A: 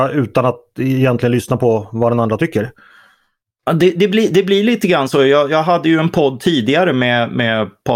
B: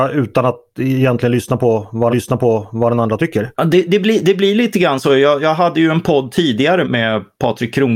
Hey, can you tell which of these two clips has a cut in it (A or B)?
B